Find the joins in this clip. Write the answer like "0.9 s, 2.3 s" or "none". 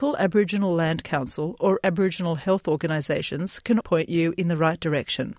3.8 s